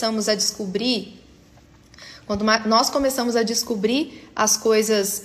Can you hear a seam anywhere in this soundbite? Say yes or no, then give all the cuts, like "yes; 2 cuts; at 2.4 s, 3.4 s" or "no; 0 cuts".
no; 0 cuts